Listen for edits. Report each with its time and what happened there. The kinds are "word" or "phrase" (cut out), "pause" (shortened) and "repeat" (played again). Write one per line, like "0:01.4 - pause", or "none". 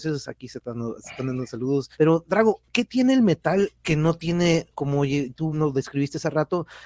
0:01.9 - pause
0:03.8 - pause
0:04.7 - phrase
0:05.5 - word